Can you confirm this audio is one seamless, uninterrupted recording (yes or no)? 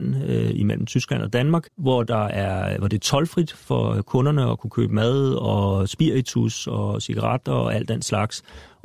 no